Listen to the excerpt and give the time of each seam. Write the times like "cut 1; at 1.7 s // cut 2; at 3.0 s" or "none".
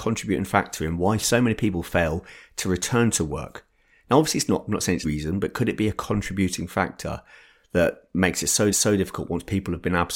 cut 1; at 5.0 s // cut 2; at 8.7 s